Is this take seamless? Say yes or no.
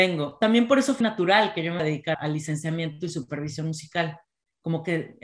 no